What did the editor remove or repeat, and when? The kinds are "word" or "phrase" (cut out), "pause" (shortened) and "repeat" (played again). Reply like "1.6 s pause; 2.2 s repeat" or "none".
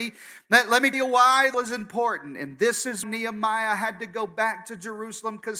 0.9 s word; 1.5 s word; 3.0 s word